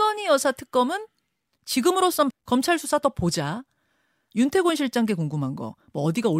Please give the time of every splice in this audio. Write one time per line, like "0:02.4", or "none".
0:02.3
0:04.3